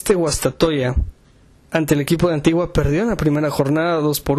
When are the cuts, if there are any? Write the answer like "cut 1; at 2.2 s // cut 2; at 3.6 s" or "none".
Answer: cut 1; at 1.2 s